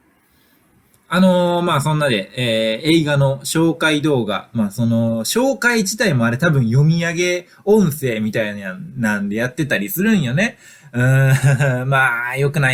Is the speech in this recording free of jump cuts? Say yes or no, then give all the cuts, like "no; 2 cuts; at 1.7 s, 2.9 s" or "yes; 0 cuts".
yes; 0 cuts